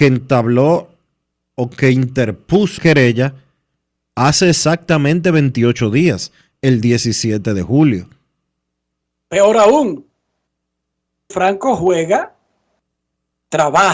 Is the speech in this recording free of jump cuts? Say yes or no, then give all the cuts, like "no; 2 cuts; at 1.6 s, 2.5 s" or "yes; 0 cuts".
no; 2 cuts; at 2.8 s, 11.3 s